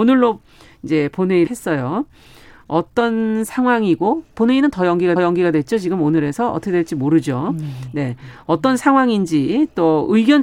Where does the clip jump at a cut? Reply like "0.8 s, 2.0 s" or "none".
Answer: 1.5 s, 5.2 s